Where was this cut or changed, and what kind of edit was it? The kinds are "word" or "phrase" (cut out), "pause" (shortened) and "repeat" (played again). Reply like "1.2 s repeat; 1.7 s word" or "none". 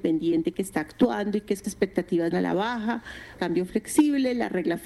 1.6 s phrase; 2.3 s phrase; 3.4 s phrase